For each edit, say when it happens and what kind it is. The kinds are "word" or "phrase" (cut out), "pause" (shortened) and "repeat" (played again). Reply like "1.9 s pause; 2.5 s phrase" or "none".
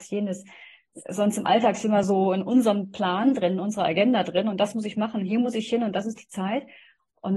none

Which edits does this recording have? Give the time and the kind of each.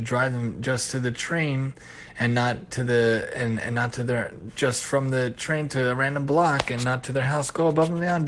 none

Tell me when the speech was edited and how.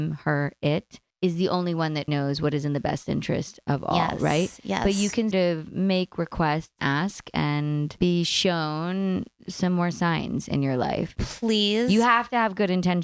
2.1 s word; 5.3 s word; 6.8 s word; 8.0 s word

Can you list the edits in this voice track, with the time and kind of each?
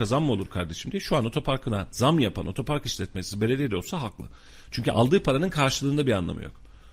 none

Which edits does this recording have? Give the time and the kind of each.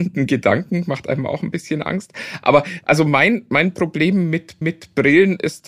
4.6 s repeat

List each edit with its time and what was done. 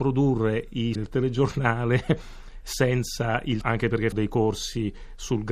1.0 s word; 3.6 s word; 4.1 s word

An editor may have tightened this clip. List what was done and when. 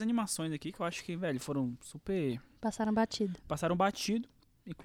none

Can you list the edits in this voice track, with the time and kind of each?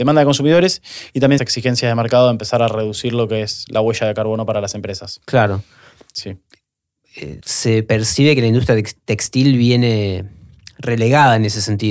1.4 s word; 7.4 s word

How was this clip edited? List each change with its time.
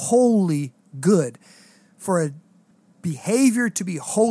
none

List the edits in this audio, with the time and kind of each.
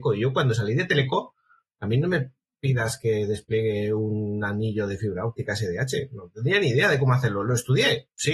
none

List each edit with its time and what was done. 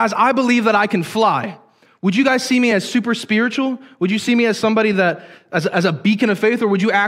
none

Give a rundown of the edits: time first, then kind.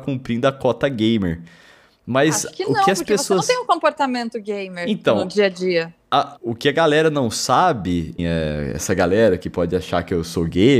6.4 s word; 8.2 s word

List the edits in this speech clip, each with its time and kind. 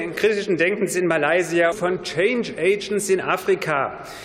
1.7 s phrase

